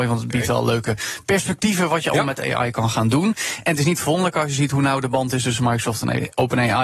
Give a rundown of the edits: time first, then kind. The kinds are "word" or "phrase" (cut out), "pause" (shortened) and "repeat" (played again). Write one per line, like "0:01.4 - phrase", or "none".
none